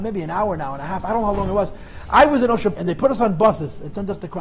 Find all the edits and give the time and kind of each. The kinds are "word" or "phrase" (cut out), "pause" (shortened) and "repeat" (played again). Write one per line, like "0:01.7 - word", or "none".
0:02.7 - word